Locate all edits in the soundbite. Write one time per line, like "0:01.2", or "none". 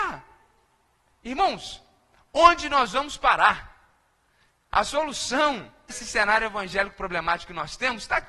0:05.9